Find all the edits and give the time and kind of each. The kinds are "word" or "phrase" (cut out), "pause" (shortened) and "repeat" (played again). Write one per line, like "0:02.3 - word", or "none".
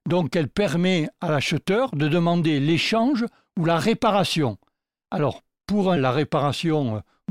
0:06.0 - word